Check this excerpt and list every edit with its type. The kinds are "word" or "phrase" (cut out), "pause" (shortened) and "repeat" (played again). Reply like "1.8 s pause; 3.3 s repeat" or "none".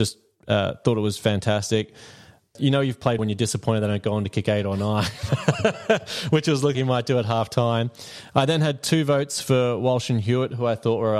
3.2 s word; 6.7 s word